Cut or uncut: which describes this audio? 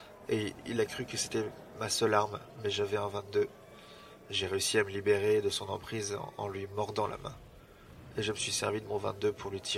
uncut